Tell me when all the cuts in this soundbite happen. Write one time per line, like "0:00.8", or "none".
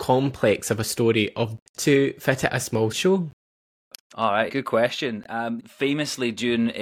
0:01.6
0:02.5
0:02.9
0:04.5
0:05.6